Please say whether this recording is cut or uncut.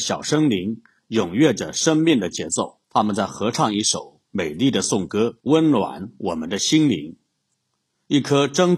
cut